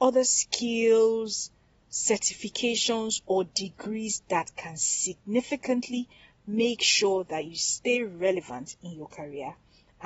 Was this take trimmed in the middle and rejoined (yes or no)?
no